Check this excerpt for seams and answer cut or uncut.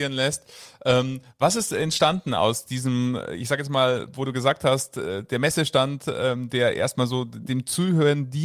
uncut